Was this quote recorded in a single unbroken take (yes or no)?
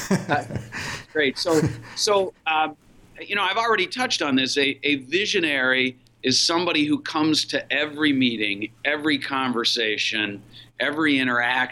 yes